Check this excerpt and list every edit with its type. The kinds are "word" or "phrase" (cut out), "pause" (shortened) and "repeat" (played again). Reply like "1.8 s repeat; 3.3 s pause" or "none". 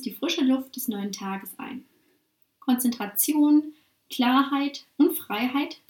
none